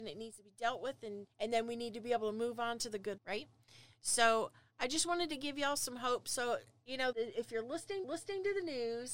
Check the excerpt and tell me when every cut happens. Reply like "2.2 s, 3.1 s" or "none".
1.3 s, 3.2 s, 7.1 s, 8.0 s